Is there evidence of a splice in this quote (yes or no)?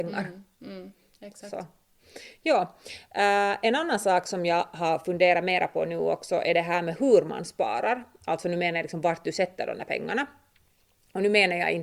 no